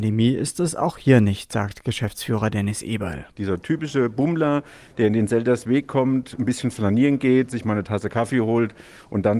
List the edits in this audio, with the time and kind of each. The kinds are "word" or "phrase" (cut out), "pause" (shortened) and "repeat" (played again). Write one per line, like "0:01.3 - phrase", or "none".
none